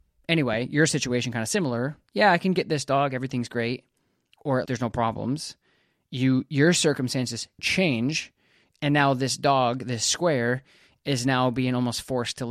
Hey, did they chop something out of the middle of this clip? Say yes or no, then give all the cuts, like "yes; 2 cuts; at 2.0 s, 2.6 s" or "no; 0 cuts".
yes; 2 cuts; at 2.1 s, 4.7 s